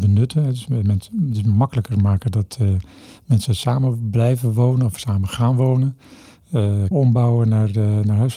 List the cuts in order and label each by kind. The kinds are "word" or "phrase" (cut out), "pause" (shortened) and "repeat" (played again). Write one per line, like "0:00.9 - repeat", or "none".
0:06.9 - word